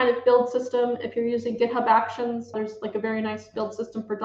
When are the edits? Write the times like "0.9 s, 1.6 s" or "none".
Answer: 2.5 s